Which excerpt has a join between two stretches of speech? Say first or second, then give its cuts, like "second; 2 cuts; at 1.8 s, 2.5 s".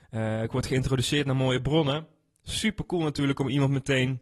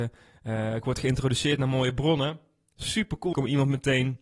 second; 1 cut; at 3.3 s